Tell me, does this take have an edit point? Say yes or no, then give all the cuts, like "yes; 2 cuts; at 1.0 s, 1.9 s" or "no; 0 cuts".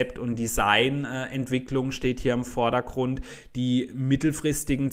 no; 0 cuts